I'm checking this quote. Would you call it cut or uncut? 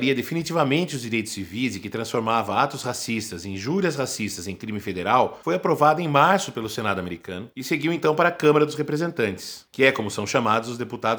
uncut